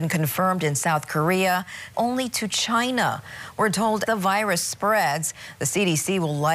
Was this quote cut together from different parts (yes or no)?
yes